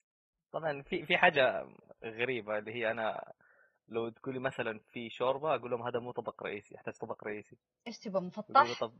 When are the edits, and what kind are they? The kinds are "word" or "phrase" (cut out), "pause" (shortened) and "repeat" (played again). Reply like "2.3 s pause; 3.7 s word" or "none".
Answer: none